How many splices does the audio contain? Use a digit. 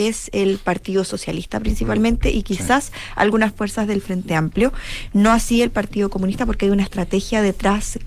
0